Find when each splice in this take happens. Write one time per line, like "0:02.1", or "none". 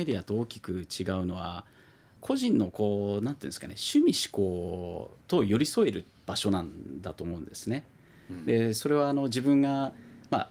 0:05.2